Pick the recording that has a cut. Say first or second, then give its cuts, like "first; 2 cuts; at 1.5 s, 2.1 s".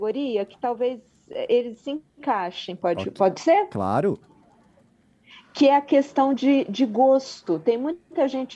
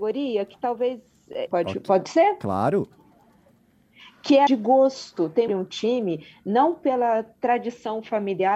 second; 3 cuts; at 1.5 s, 4.5 s, 5.5 s